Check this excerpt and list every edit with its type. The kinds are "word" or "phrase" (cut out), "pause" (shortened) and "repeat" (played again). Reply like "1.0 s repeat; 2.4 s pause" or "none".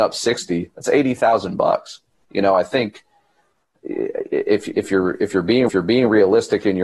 5.7 s repeat